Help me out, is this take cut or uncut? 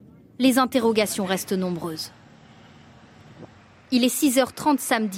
uncut